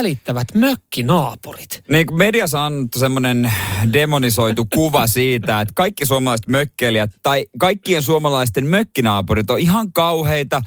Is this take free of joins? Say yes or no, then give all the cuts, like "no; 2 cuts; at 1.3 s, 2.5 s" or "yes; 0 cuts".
yes; 0 cuts